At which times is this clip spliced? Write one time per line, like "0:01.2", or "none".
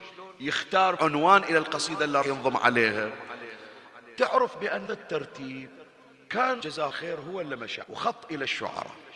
0:01.0
0:02.2
0:04.9
0:06.6
0:06.9
0:07.8